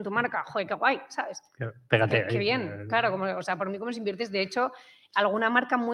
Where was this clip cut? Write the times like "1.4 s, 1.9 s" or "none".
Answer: none

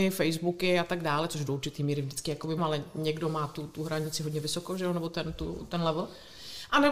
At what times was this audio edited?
2.6 s

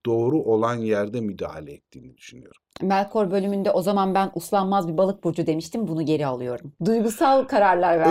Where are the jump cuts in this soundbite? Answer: none

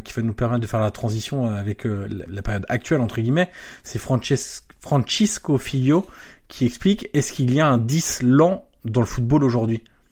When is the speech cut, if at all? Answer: 2.3 s

